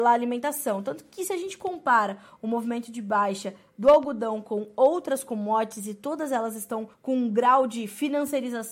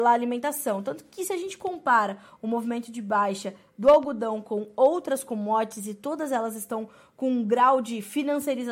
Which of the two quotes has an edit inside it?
first; 1 cut; at 6.9 s

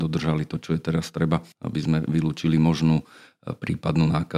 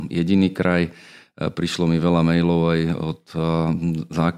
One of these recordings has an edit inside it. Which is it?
first; 1 cut; at 1.5 s

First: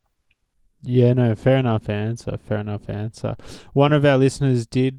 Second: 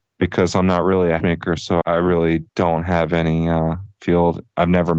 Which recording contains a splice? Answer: second; 4 cuts; at 1.2 s, 1.8 s, 2.5 s, 4.0 s

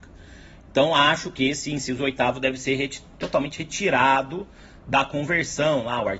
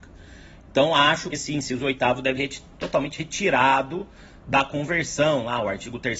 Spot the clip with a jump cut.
second; 2 cuts; at 1.3 s, 2.4 s

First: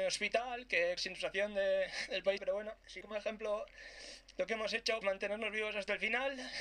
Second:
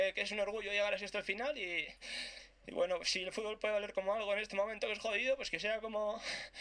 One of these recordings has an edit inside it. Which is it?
first; 4 cuts; at 1.0 s, 2.4 s, 3.0 s, 5.0 s

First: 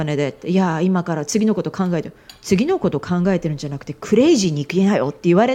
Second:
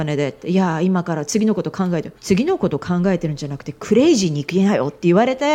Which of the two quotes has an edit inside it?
second; 1 cut; at 2.2 s

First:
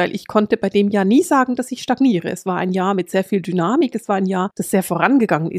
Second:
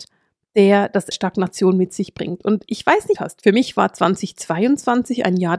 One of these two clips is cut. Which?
second; 2 cuts; at 1.1 s, 3.2 s

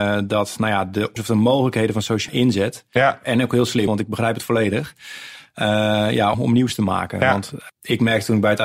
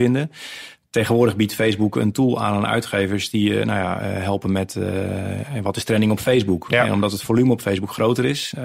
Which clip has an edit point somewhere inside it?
first; 5 cuts; at 1.2 s, 2.3 s, 3.9 s, 6.3 s, 7.7 s

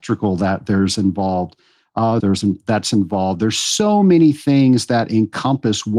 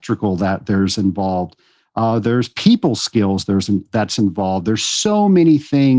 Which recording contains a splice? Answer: first; 1 cut; at 2.2 s

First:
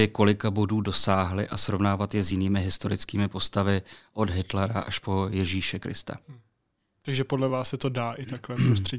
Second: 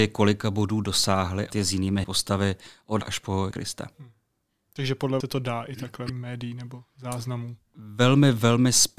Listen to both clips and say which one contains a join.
second; 6 cuts; at 1.5 s, 2.0 s, 3.0 s, 3.5 s, 5.2 s, 6.1 s

